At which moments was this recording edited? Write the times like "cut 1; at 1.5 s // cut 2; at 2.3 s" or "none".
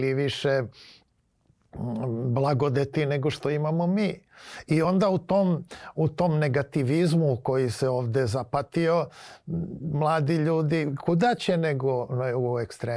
none

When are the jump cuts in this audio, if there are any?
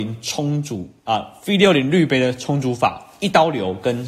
cut 1; at 1.0 s

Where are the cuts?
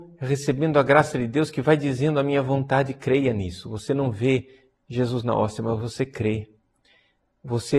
none

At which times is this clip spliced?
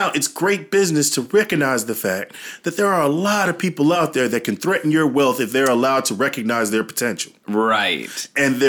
none

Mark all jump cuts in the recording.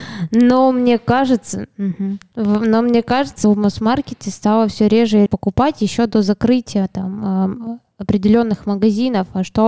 cut 1; at 3.4 s // cut 2; at 5.3 s

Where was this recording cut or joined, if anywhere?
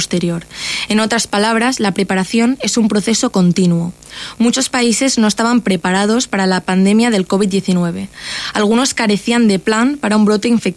none

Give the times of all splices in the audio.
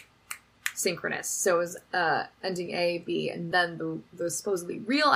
none

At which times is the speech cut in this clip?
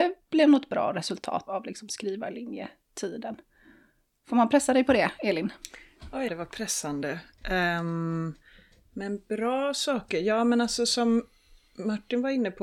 cut 1; at 1.5 s // cut 2; at 6.3 s

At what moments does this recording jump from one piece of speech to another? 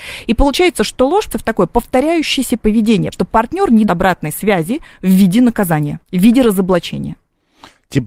cut 1; at 1.3 s // cut 2; at 3.1 s // cut 3; at 3.9 s // cut 4; at 6.0 s

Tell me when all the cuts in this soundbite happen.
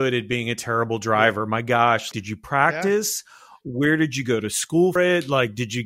cut 1; at 2.1 s // cut 2; at 5.0 s

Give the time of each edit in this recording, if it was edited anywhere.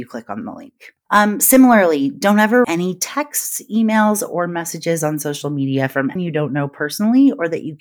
cut 1; at 2.6 s // cut 2; at 6.2 s

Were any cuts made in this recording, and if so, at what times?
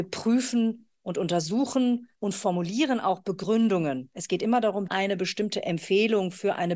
cut 1; at 4.9 s

